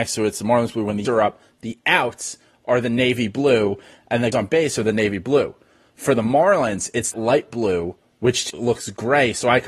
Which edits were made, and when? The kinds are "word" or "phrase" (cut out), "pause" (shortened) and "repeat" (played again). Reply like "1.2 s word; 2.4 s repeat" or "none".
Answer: 1.0 s word; 4.3 s word; 7.1 s word; 8.5 s word